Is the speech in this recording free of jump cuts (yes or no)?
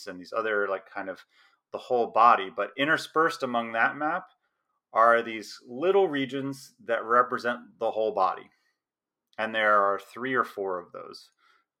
yes